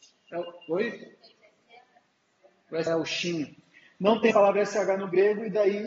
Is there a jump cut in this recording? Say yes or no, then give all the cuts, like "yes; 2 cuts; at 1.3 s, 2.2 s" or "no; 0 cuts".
yes; 2 cuts; at 2.9 s, 4.3 s